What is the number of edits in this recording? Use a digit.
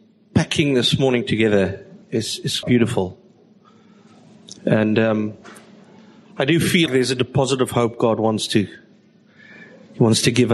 4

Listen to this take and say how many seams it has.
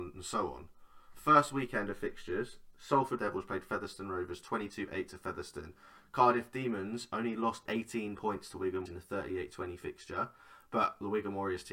3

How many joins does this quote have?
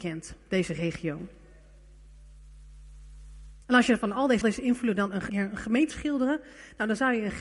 4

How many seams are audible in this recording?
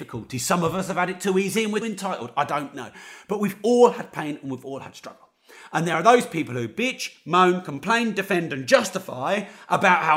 1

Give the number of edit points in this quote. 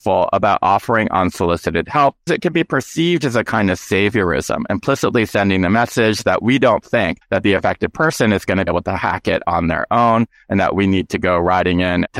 3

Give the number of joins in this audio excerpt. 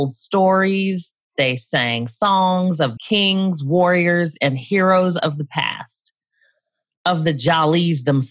1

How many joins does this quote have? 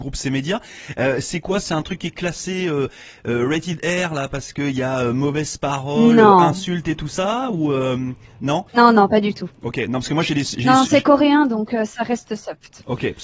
1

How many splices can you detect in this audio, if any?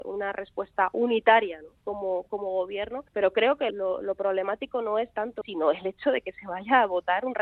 4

